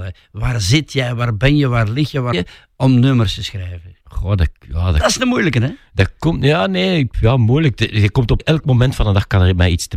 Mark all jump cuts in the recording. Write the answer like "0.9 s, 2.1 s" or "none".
2.3 s, 4.0 s, 7.1 s, 8.4 s